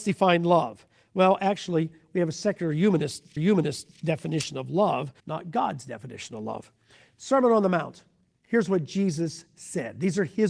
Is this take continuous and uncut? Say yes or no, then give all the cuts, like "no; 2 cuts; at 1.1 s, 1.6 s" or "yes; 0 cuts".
no; 2 cuts; at 3.4 s, 5.2 s